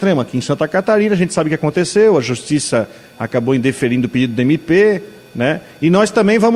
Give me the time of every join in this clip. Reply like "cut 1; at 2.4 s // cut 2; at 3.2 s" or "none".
none